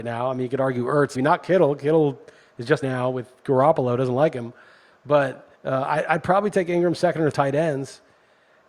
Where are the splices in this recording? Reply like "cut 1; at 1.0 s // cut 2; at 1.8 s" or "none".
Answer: cut 1; at 1.2 s // cut 2; at 2.8 s // cut 3; at 5.5 s // cut 4; at 7.3 s